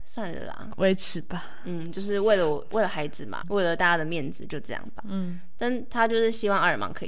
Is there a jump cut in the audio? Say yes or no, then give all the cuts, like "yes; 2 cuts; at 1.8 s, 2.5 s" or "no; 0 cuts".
yes; 1 cut; at 3.4 s